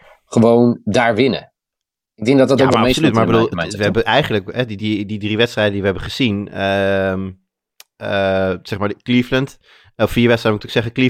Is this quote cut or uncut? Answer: uncut